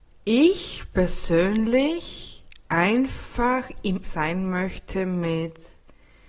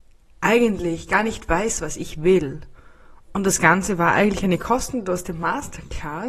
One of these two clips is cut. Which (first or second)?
first